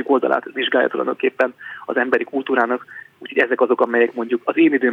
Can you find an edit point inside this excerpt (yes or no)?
no